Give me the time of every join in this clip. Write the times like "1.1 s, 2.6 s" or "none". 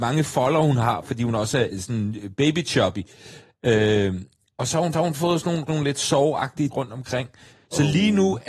1.7 s, 4.9 s, 5.7 s, 6.7 s